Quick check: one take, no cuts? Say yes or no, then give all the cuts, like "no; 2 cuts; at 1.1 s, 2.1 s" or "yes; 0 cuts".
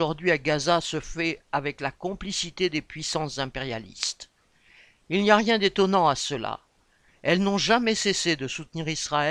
yes; 0 cuts